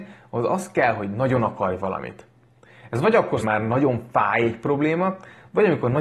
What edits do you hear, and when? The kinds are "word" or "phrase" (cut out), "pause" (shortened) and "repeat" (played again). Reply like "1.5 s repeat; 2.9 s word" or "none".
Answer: 3.4 s phrase

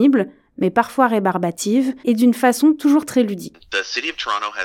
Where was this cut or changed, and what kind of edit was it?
2.0 s pause

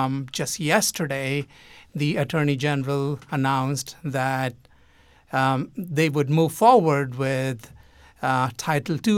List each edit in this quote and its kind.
none

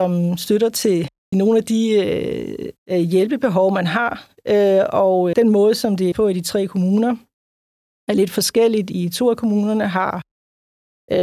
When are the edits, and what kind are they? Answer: 1.3 s phrase; 2.8 s pause; 5.3 s word; 6.1 s word

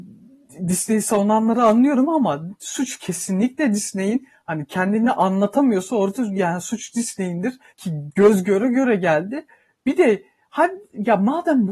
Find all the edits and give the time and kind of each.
7.7 s pause

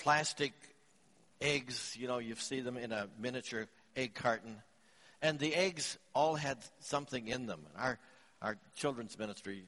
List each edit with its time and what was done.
none

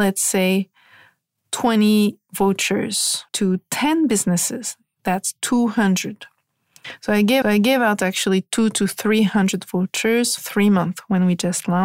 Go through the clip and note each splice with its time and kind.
3.3 s pause; 7.4 s repeat; 10.4 s word

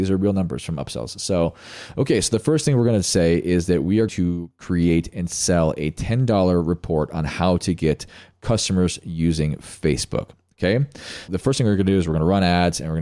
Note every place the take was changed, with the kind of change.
4.1 s word; 11.3 s word

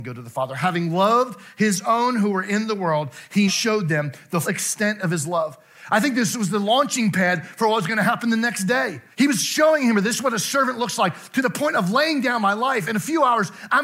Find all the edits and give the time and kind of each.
3.5 s word; 4.4 s word; 9.1 s pause

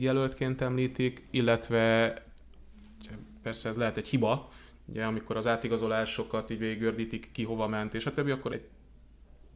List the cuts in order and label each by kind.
8.5 s word

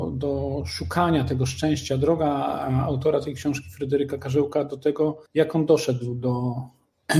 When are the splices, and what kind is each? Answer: 5.3 s pause

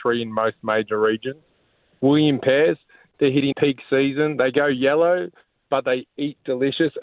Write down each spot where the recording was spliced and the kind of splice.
3.5 s word

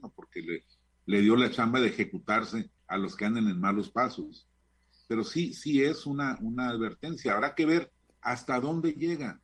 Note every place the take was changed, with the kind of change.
2.8 s pause; 8.0 s pause

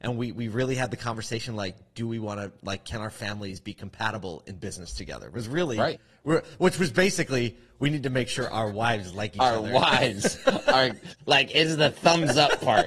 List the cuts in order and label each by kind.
none

